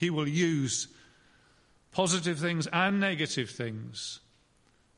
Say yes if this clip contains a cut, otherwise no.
no